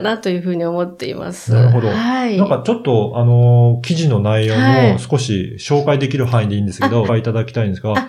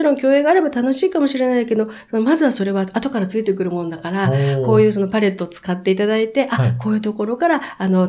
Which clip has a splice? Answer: first; 1 cut; at 7.1 s

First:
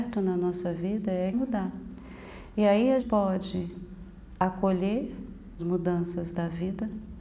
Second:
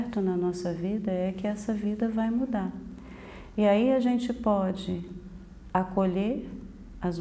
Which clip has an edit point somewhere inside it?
first; 3 cuts; at 1.3 s, 3.0 s, 5.6 s

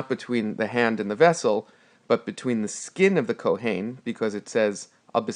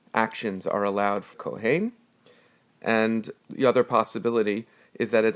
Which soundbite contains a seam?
second; 2 cuts; at 1.3 s, 3.4 s

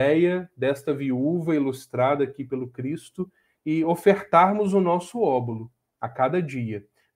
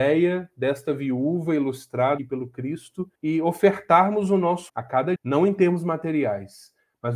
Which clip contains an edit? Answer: second; 4 cuts; at 2.2 s, 3.1 s, 4.7 s, 5.2 s

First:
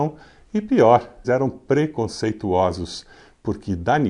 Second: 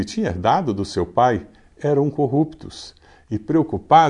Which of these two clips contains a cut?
first; 1 cut; at 1.2 s

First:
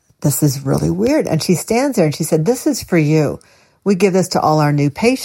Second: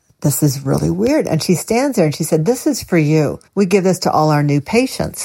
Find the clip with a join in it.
second; 1 cut; at 3.5 s

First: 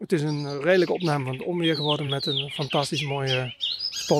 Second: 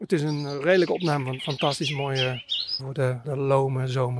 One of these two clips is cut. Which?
second; 3 cuts; at 1.4 s, 2.8 s, 3.2 s

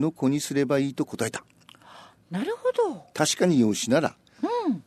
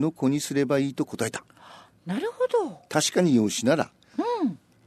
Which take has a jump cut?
second; 1 cut; at 1.5 s

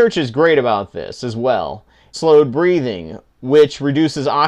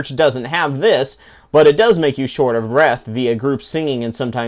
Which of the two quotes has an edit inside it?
first; 1 cut; at 2.1 s

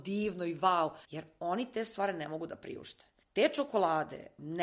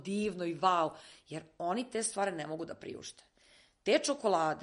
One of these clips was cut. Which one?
first; 2 cuts; at 1.0 s, 3.2 s

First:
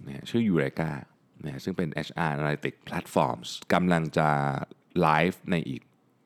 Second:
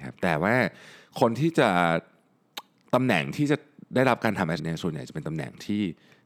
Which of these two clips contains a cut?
second; 1 cut; at 4.6 s

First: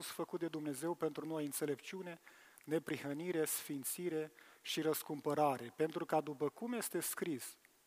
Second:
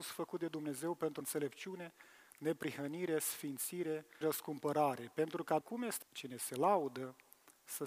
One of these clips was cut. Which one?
second; 4 cuts; at 1.2 s, 4.2 s, 5.6 s, 6.0 s

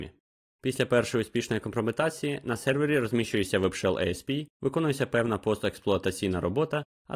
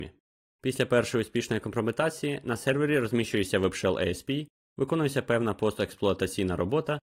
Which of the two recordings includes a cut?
first; 1 cut; at 4.5 s

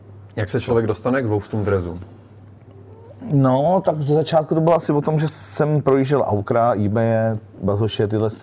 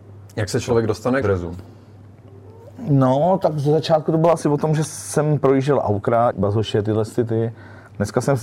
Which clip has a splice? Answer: second; 2 cuts; at 1.2 s, 6.3 s

